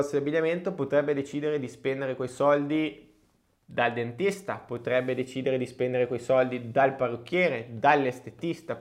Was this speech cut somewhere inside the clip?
no; 0 cuts

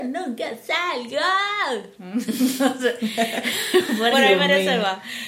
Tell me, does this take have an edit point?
yes; 1 cut; at 4.1 s

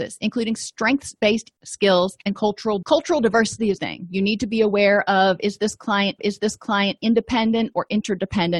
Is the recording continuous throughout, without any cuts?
no; 5 cuts; at 1.5 s, 2.2 s, 2.8 s, 3.8 s, 6.2 s

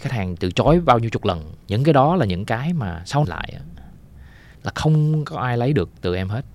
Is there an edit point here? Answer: yes; 3 cuts; at 1.6 s, 3.2 s, 4.5 s

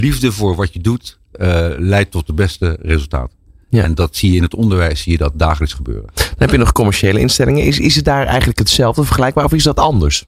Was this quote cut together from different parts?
no; 0 cuts

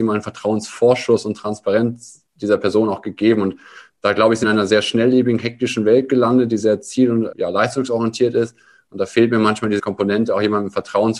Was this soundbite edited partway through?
yes; 3 cuts; at 4.4 s, 7.3 s, 9.8 s

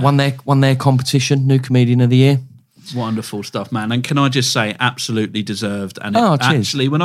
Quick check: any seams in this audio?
no; 0 cuts

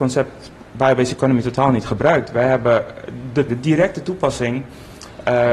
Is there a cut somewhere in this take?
yes; 1 cut; at 3.5 s

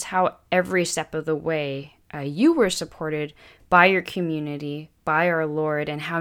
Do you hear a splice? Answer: no; 0 cuts

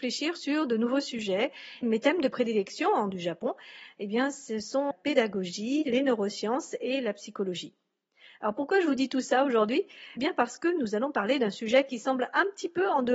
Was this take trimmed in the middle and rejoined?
yes; 4 cuts; at 1.8 s, 3.1 s, 4.9 s, 10.2 s

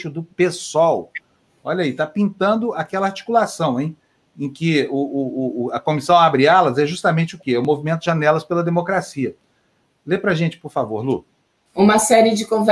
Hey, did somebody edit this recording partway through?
no; 0 cuts

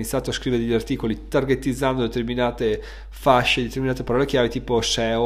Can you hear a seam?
no; 0 cuts

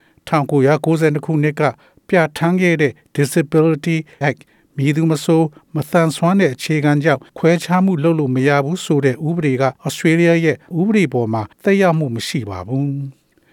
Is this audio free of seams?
no; 5 cuts; at 4.2 s, 7.3 s, 9.8 s, 10.7 s, 11.5 s

